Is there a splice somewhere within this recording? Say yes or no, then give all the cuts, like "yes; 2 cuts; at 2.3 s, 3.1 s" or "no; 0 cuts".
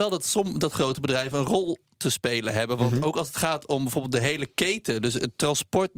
no; 0 cuts